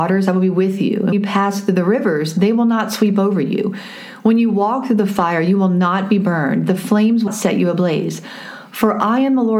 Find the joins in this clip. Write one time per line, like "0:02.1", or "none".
0:01.1
0:07.3

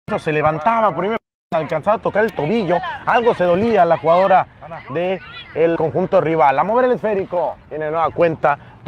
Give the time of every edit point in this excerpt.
0:05.8

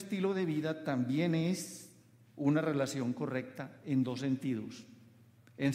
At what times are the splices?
none

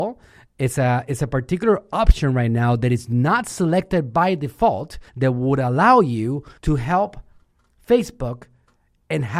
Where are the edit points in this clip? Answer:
0:05.1
0:06.6

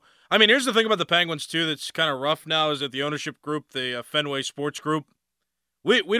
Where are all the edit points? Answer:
none

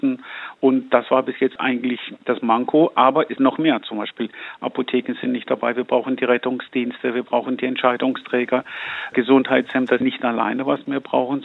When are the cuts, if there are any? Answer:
0:02.2
0:03.4
0:10.0

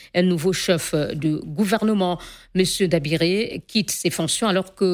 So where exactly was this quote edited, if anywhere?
none

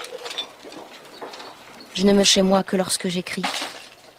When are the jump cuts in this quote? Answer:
0:02.2

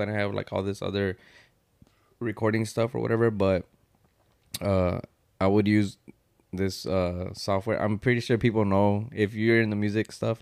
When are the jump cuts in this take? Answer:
none

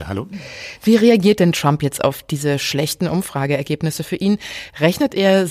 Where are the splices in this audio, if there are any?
none

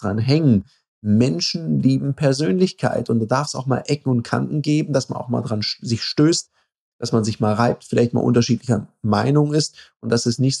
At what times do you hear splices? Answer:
none

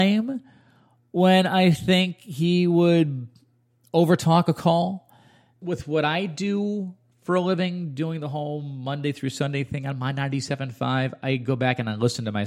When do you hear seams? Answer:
none

